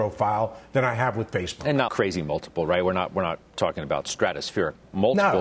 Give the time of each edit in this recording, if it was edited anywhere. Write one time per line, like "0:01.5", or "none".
0:01.9

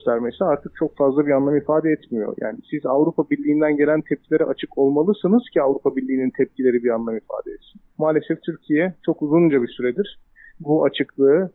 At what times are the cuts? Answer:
0:07.9

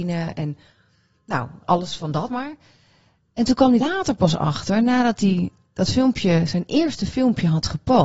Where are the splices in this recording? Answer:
0:01.6
0:02.3
0:03.8

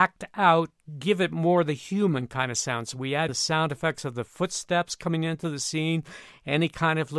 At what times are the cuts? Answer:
0:03.3

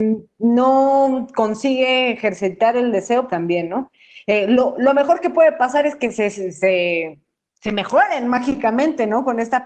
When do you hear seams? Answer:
0:03.3

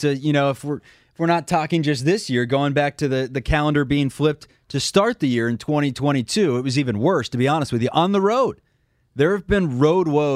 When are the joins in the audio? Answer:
none

